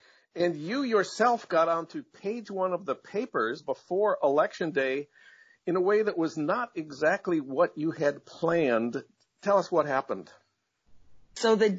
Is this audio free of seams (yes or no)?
yes